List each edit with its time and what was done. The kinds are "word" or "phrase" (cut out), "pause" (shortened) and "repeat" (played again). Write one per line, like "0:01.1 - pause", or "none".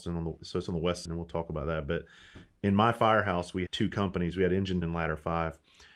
0:01.1 - word
0:03.7 - word
0:04.8 - word